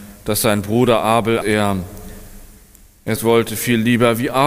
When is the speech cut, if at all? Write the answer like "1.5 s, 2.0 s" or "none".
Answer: 1.4 s, 3.2 s

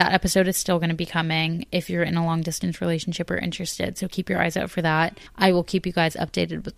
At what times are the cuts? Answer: 5.3 s

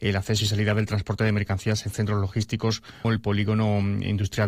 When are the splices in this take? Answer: 3.0 s

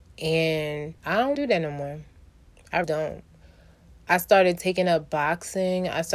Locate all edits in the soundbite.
1.0 s, 1.3 s, 2.8 s

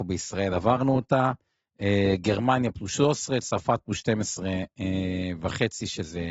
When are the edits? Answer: none

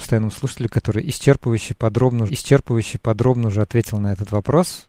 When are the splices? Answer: 2.3 s

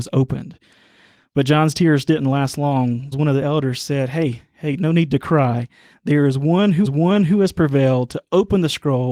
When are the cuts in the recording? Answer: 3.1 s, 6.8 s

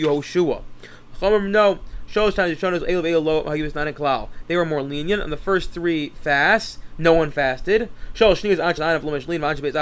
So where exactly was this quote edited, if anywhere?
8.8 s

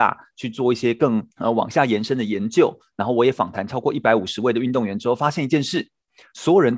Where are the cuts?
1.3 s

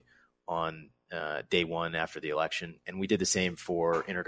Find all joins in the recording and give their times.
none

